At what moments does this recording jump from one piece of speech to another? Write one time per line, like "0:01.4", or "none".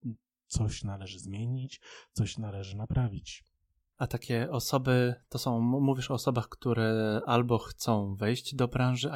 none